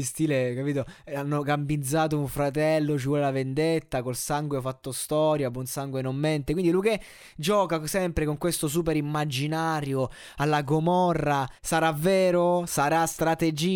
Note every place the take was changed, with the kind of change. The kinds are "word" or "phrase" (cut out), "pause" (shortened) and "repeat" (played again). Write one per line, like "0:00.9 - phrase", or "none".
0:11.6 - pause